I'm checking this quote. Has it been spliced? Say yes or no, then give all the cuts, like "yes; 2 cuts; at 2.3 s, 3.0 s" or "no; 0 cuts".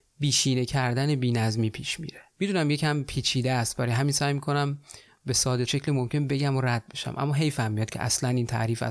yes; 2 cuts; at 2.3 s, 5.7 s